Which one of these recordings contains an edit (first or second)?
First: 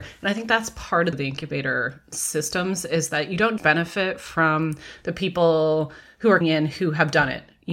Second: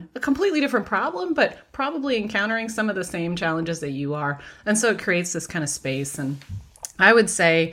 first